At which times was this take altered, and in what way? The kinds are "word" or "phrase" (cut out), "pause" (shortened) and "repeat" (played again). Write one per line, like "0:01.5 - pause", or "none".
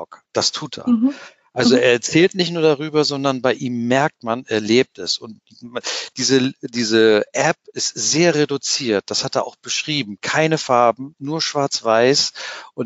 none